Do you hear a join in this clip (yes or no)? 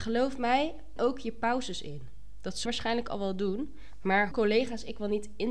yes